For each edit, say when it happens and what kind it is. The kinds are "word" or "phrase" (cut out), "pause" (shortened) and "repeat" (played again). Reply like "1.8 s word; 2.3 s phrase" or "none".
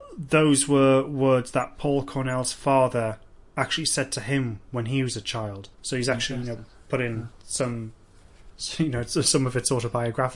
5.7 s pause